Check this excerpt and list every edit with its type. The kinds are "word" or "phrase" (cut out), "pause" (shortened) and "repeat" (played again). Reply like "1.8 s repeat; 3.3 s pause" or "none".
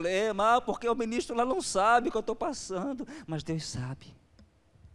none